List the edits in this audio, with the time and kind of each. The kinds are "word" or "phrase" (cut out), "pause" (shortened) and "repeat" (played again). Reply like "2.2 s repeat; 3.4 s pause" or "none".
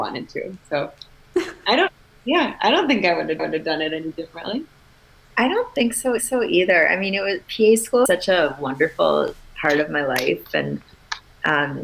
3.4 s repeat; 6.2 s repeat; 8.1 s word